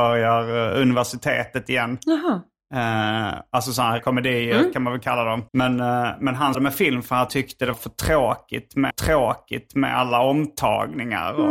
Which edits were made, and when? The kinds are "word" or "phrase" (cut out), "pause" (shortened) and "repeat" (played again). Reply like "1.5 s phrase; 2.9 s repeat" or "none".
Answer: 4.0 s word; 5.5 s pause; 6.5 s word; 7.3 s word; 7.7 s word; 8.9 s repeat

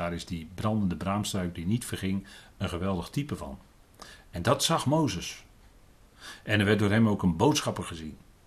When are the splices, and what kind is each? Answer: none

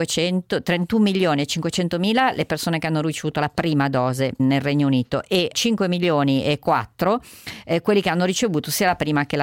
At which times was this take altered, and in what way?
4.4 s word; 5.5 s word

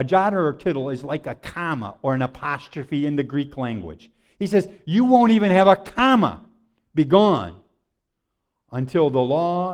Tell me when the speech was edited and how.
none

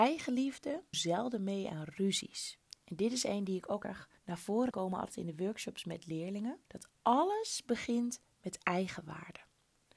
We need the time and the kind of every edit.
0.9 s word; 3.8 s word; 4.2 s pause; 4.7 s word; 6.6 s pause

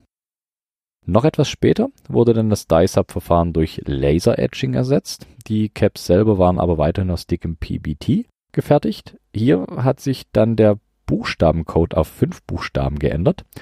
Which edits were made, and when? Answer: none

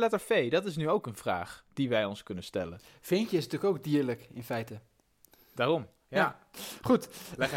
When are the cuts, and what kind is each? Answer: none

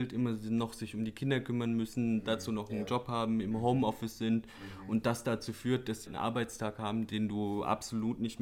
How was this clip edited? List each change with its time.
6.1 s word

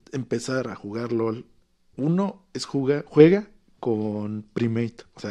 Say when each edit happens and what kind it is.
none

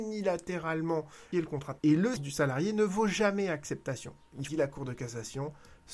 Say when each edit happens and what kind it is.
1.3 s word; 1.8 s word; 2.2 s word; 4.5 s phrase

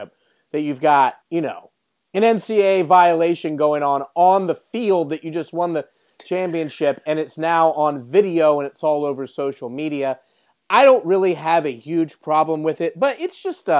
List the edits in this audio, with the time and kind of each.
1.2 s pause

